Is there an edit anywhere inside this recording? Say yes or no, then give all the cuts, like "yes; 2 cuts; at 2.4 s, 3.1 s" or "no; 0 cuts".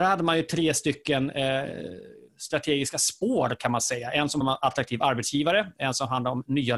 yes; 2 cuts; at 2.3 s, 4.4 s